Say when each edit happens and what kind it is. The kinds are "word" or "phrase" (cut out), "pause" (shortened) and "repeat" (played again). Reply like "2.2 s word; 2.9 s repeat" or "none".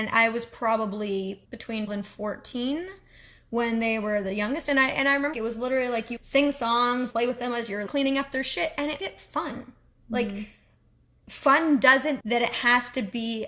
1.4 s word; 1.9 s word; 5.3 s word; 6.2 s word; 7.1 s word; 7.9 s word; 9.0 s word; 12.2 s word

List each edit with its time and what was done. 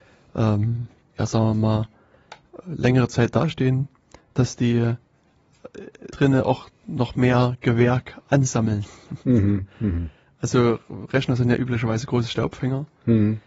2.6 s word; 6.1 s word

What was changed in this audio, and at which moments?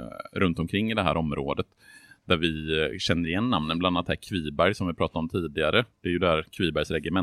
none

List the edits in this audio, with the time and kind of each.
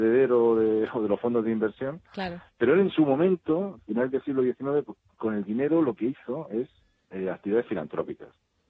none

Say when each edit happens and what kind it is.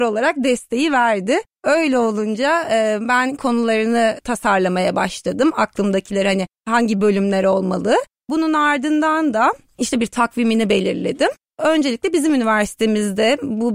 3.4 s word

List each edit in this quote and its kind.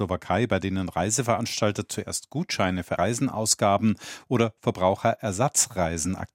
3.0 s word

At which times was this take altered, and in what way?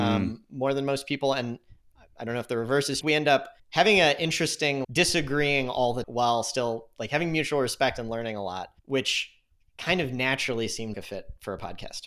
3.0 s phrase; 3.6 s pause; 4.8 s word; 6.0 s word; 8.8 s pause; 10.9 s word

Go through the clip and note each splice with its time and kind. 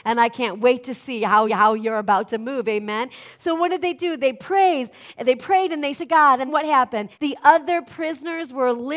1.5 s repeat; 5.9 s phrase; 6.5 s word; 7.1 s pause

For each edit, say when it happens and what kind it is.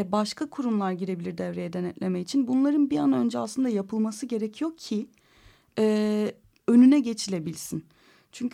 none

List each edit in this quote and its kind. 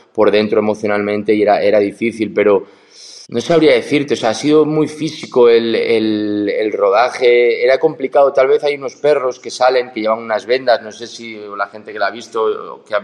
3.2 s pause

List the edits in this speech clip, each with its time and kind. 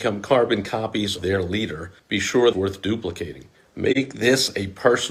1.2 s word; 2.0 s pause; 2.5 s phrase; 3.5 s pause

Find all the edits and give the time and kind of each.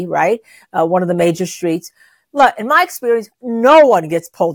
none

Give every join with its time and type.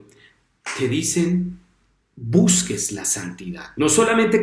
2.0 s word

